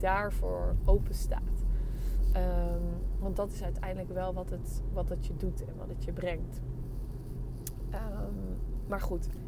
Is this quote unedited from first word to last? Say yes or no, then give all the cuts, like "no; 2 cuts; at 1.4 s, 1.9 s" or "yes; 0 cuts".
yes; 0 cuts